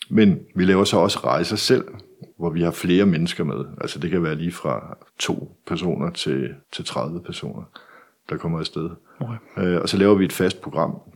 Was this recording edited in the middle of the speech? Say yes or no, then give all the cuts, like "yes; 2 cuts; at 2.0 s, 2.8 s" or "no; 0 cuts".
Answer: yes; 3 cuts; at 2.3 s, 5.1 s, 6.6 s